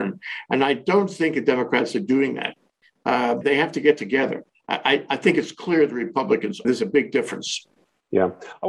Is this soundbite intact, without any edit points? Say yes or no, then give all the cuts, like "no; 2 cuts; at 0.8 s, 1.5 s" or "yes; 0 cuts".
no; 2 cuts; at 3.4 s, 6.6 s